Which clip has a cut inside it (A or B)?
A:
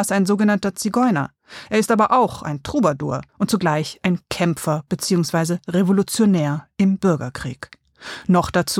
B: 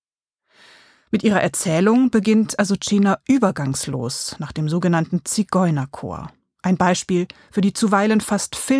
A